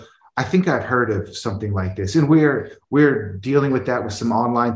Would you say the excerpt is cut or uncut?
uncut